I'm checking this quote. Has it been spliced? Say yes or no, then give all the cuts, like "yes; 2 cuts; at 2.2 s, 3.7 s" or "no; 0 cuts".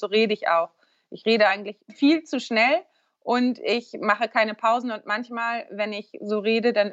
no; 0 cuts